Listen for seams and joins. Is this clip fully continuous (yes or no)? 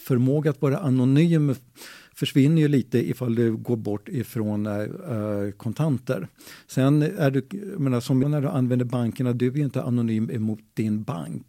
no